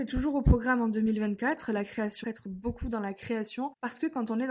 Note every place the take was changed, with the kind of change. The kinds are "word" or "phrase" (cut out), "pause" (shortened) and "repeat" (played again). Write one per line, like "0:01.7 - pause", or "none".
0:02.2 - word